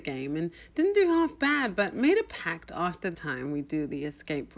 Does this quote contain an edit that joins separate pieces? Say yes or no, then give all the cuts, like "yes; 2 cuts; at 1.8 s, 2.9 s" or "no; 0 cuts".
yes; 1 cut; at 3.1 s